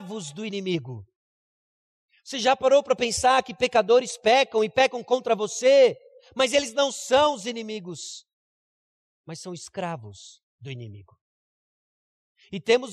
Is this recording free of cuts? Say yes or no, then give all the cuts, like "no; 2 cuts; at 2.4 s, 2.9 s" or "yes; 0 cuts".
yes; 0 cuts